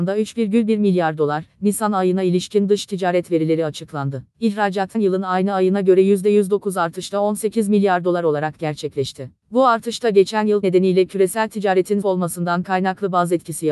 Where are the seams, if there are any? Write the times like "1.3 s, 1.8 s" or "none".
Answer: 4.9 s, 10.6 s, 12.0 s

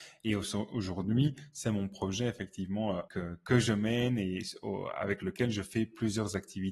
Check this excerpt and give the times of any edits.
3.1 s

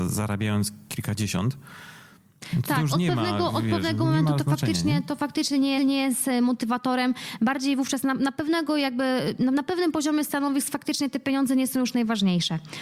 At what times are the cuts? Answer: 5.8 s

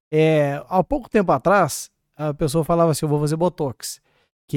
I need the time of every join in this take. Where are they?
none

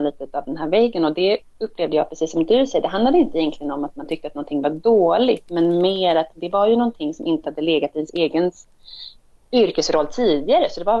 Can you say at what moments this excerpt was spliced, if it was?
none

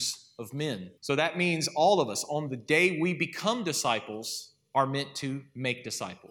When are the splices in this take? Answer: 1.0 s

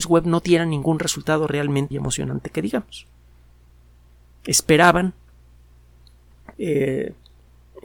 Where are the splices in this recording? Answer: 1.9 s, 6.5 s

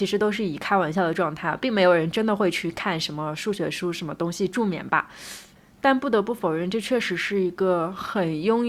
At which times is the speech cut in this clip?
none

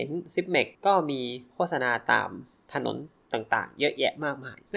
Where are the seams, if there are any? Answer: none

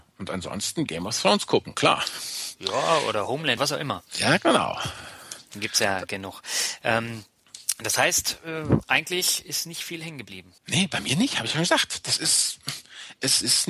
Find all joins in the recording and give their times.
3.6 s, 10.6 s

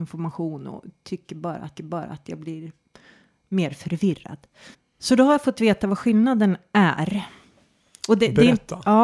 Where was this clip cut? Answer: 1.8 s, 4.7 s

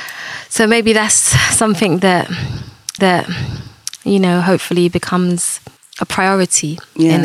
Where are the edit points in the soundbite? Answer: 3.0 s, 5.8 s

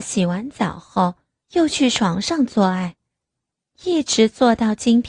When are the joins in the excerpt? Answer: 1.4 s, 3.5 s

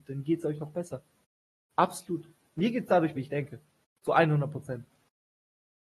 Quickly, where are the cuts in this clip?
3.2 s

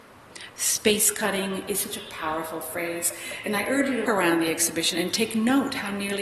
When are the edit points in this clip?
4.1 s

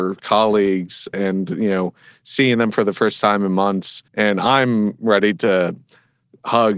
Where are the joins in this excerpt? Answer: 1.1 s, 4.1 s

